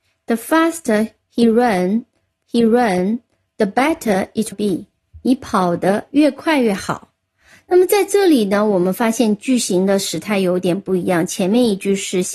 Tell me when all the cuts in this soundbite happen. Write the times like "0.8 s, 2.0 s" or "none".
2.4 s, 4.5 s